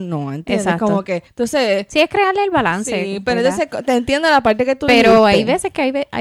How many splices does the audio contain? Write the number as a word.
one